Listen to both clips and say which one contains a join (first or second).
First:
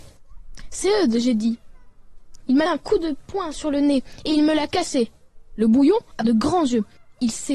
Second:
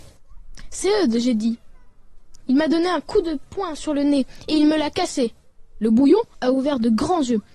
first